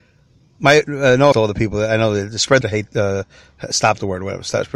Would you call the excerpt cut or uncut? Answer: cut